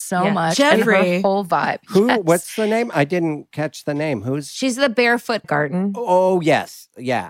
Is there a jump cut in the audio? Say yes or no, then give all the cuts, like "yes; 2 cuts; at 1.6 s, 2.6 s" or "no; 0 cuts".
yes; 1 cut; at 5.4 s